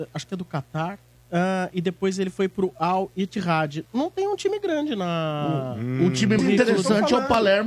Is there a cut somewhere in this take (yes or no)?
yes